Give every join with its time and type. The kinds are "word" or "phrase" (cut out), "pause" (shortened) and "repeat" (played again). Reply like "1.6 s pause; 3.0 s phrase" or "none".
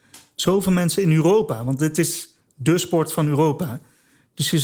none